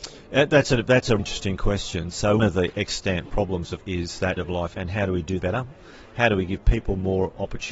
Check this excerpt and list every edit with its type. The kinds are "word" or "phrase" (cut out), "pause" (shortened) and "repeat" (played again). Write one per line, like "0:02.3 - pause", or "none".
0:01.2 - word
0:02.4 - word
0:03.8 - word
0:04.4 - word
0:04.8 - word
0:05.4 - word